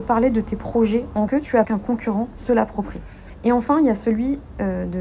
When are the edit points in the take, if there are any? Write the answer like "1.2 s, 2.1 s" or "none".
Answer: 1.3 s, 1.6 s